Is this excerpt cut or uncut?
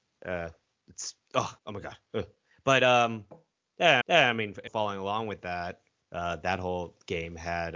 cut